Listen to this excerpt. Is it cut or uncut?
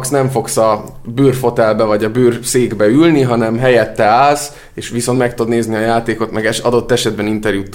uncut